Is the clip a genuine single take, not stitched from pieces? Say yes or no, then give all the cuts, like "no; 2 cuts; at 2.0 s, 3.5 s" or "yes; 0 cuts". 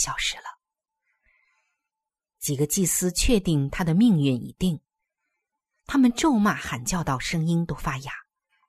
yes; 0 cuts